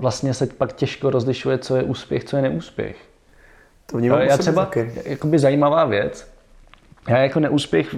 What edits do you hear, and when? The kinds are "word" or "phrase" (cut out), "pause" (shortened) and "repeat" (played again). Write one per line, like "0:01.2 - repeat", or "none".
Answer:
none